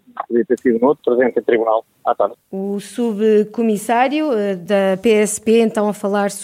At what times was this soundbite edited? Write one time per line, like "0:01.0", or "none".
0:01.0
0:02.4